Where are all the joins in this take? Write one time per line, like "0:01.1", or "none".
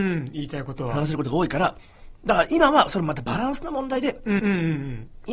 0:04.4